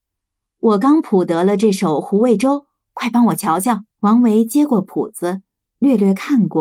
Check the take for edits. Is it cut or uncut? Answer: cut